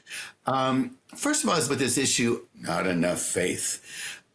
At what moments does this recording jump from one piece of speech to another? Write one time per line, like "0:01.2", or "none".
0:01.7
0:02.5